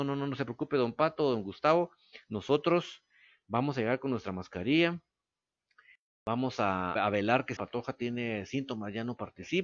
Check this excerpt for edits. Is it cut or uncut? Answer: cut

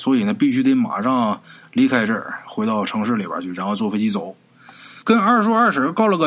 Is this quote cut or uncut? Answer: uncut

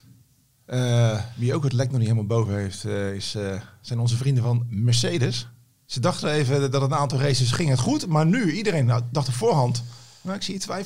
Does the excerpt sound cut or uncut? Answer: uncut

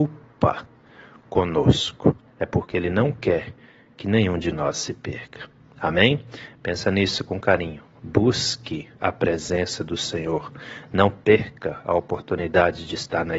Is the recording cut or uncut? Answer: uncut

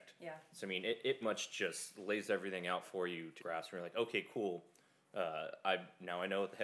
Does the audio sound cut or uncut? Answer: cut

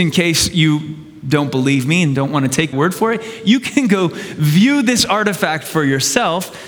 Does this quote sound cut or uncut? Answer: cut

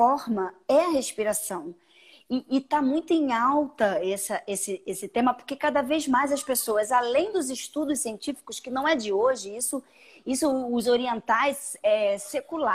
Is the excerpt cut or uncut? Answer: uncut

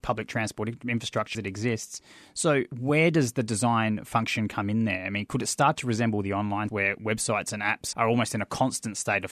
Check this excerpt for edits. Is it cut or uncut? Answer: cut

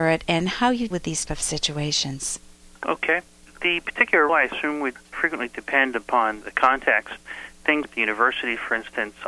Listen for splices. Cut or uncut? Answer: cut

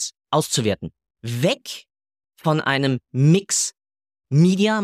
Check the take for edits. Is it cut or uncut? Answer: uncut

